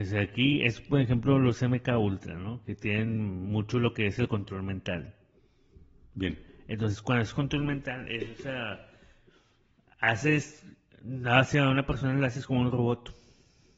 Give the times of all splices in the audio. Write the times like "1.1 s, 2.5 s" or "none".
none